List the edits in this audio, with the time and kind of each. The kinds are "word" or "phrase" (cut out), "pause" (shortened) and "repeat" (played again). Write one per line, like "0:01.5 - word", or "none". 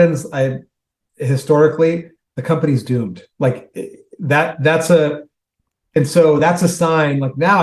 none